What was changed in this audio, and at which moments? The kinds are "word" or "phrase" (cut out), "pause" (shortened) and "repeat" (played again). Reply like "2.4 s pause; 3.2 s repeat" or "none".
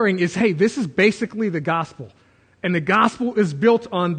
none